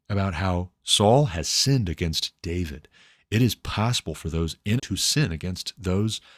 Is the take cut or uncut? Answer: cut